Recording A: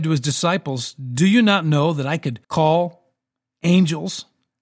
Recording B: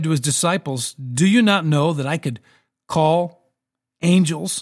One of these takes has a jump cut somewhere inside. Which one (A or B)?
A